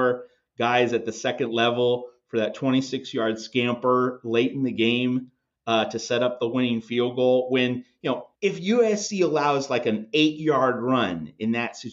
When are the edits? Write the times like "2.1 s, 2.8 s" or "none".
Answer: 8.4 s